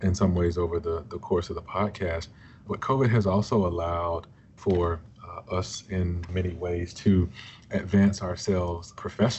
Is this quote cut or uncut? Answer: uncut